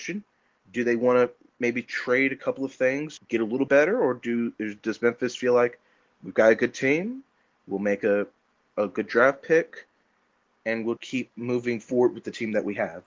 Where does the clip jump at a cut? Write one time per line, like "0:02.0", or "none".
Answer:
0:03.2
0:03.7
0:11.0